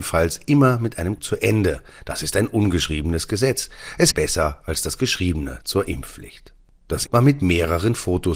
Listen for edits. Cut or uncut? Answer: cut